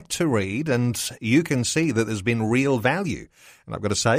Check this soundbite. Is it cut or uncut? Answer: uncut